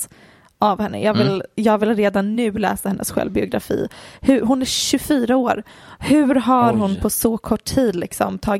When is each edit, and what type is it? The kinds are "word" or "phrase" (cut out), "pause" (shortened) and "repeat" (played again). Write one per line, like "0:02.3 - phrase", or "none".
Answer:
none